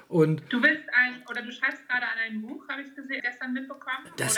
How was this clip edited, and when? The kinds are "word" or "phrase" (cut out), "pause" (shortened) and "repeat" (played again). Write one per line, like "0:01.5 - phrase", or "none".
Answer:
0:03.2 - word

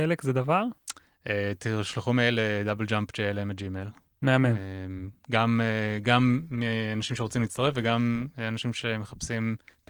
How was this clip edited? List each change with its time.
none

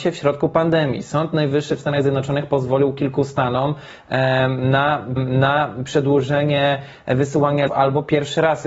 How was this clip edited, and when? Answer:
0:05.2 - repeat
0:07.7 - word

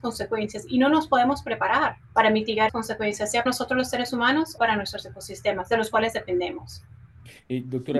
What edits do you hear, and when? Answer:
0:02.0 - pause
0:02.7 - word
0:03.5 - word
0:04.6 - word

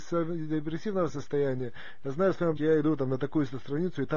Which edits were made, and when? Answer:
0:02.6 - word

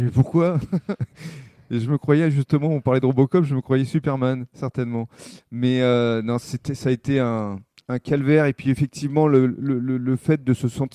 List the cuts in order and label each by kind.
none

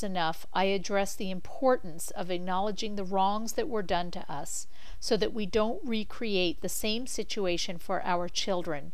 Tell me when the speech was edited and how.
none

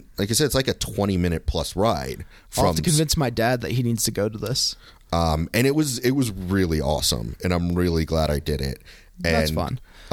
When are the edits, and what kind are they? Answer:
none

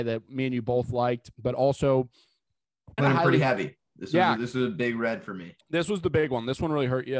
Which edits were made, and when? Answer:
0:03.0 - word

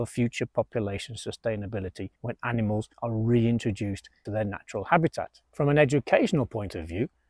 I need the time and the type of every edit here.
0:02.2 - pause
0:02.9 - pause
0:04.3 - word
0:05.4 - pause

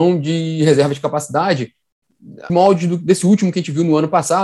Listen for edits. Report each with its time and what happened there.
0:02.5 - word

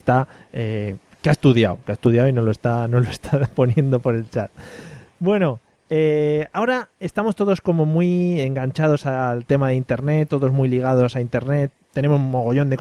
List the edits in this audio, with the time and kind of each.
none

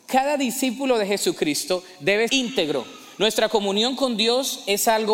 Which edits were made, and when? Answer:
0:02.3 - word

